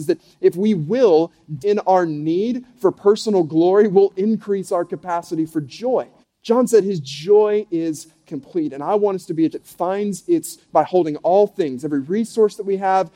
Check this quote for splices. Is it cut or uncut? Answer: cut